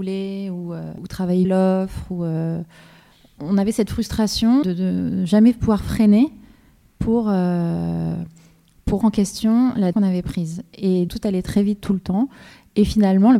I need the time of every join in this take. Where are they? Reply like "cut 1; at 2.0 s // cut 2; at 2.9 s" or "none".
cut 1; at 1.4 s // cut 2; at 3.4 s // cut 3; at 4.6 s // cut 4; at 9.0 s // cut 5; at 9.9 s // cut 6; at 11.1 s